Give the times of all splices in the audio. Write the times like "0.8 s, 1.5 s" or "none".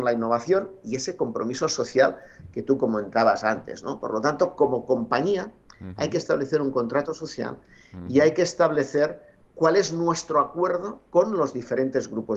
11.1 s